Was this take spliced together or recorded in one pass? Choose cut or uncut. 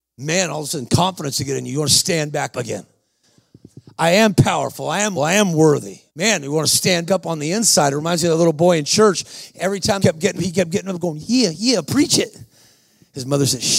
cut